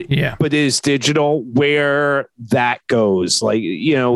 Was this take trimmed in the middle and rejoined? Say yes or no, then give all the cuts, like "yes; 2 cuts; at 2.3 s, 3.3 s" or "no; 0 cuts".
no; 0 cuts